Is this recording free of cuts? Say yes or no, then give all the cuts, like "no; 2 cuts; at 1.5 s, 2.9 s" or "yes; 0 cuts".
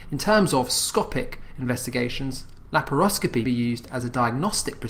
no; 1 cut; at 3.4 s